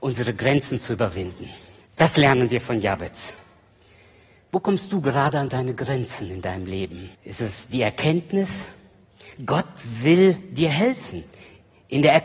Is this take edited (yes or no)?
yes